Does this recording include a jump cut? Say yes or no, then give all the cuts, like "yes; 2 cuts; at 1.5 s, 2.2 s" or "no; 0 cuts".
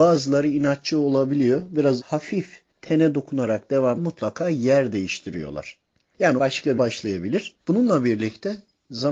yes; 6 cuts; at 2.0 s, 2.7 s, 4.0 s, 6.4 s, 6.8 s, 7.6 s